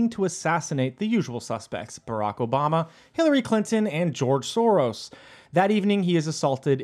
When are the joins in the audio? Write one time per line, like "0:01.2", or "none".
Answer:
none